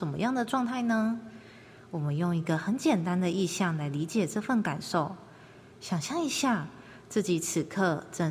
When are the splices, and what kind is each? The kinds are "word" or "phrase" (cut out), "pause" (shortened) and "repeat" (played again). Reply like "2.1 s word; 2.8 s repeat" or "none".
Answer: none